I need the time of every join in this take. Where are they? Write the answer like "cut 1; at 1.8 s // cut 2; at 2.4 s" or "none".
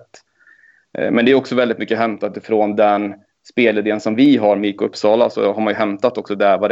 none